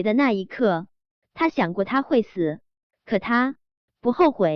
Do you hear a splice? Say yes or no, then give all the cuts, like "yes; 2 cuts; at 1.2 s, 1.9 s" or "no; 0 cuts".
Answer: no; 0 cuts